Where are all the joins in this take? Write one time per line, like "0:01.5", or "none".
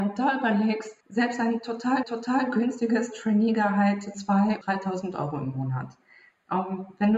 0:01.0
0:02.0
0:04.1
0:04.6